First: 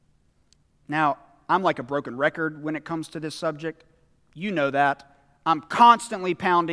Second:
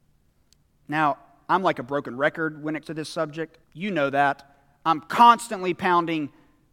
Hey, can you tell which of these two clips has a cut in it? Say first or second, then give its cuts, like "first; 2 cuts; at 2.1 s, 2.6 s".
second; 2 cuts; at 2.8 s, 3.6 s